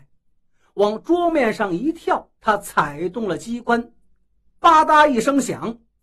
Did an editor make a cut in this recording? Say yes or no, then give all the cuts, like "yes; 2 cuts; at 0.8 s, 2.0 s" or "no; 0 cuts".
yes; 1 cut; at 2.4 s